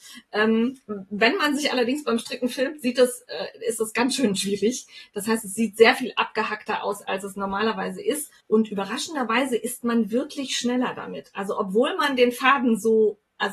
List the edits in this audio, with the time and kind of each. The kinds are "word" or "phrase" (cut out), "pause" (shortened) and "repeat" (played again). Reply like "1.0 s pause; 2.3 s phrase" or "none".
8.4 s pause